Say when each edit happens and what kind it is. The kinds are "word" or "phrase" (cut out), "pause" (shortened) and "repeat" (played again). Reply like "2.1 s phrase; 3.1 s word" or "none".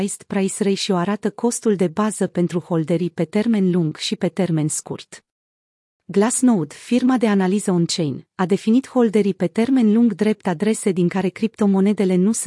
none